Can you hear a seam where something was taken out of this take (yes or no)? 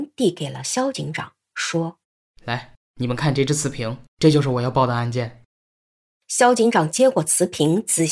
yes